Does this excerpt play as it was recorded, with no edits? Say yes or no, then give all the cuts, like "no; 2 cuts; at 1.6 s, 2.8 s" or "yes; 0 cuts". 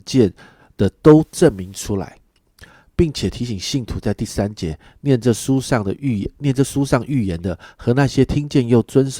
yes; 0 cuts